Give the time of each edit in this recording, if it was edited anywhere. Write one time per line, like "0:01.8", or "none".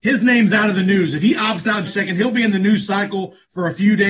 0:01.9

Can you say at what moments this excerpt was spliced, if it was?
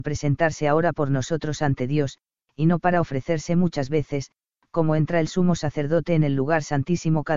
none

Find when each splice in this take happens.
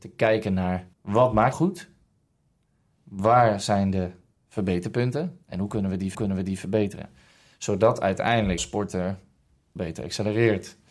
0:00.9
0:01.5
0:05.4
0:06.1
0:08.6
0:09.8

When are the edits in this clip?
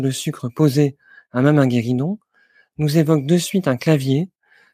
none

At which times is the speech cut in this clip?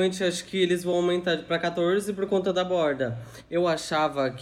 none

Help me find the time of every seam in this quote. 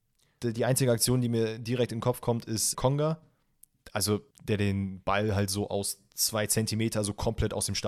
0:02.7
0:04.3

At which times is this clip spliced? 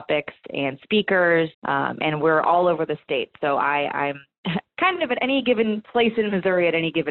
0:01.5

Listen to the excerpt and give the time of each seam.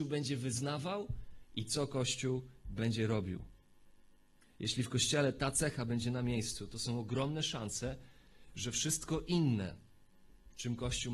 none

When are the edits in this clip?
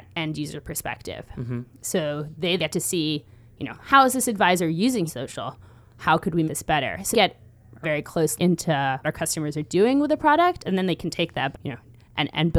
0:02.6
0:05.1
0:06.5
0:07.1
0:07.8
0:08.4
0:09.0
0:11.5

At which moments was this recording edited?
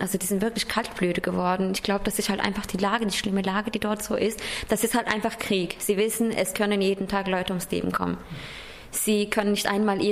none

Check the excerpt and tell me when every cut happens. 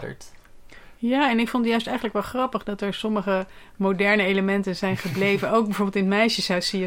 none

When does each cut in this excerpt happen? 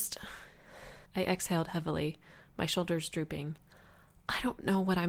0:01.1

